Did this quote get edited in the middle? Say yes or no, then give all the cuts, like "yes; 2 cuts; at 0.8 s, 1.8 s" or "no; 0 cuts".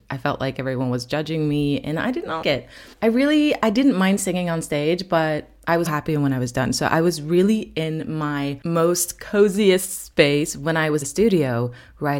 yes; 4 cuts; at 2.4 s, 2.9 s, 5.9 s, 11.0 s